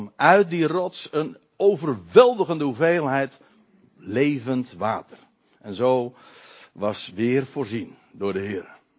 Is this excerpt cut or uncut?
uncut